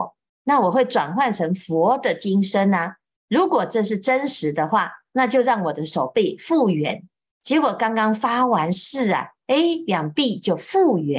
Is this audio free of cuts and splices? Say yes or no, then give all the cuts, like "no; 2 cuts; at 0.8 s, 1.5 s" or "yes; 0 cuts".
yes; 0 cuts